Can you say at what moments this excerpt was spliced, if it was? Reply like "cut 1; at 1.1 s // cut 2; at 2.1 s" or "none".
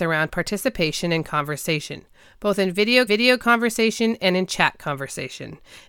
cut 1; at 3.1 s